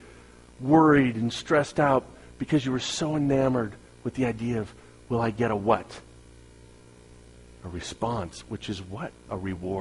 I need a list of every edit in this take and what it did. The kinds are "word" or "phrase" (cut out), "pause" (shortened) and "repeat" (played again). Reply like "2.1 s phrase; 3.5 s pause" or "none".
none